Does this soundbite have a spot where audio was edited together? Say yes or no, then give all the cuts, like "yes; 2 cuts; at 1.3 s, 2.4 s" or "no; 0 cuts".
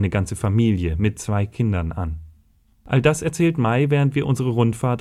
no; 0 cuts